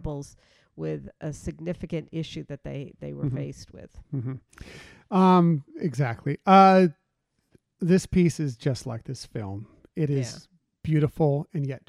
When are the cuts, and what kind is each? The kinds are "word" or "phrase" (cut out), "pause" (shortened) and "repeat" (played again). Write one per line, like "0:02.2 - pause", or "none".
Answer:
none